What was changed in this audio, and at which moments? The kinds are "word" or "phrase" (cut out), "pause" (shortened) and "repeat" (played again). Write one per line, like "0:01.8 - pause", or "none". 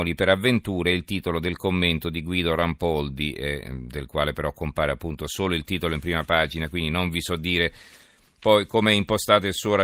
none